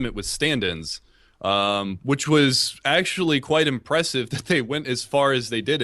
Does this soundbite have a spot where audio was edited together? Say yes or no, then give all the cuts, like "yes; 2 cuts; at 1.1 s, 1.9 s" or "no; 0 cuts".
no; 0 cuts